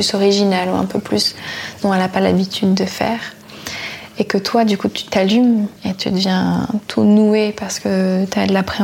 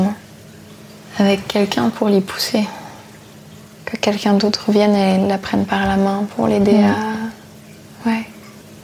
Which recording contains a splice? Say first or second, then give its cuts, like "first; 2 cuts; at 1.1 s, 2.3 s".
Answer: first; 2 cuts; at 1.8 s, 5.8 s